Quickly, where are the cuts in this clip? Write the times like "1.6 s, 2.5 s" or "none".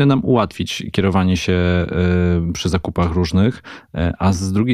none